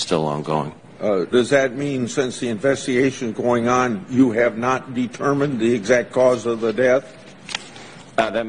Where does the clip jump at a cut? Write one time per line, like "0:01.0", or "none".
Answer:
0:01.3